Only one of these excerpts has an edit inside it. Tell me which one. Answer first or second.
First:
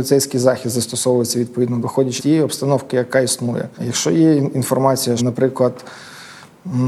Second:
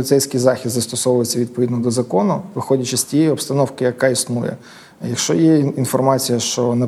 first